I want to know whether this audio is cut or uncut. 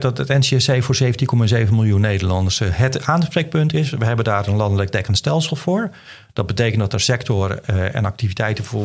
uncut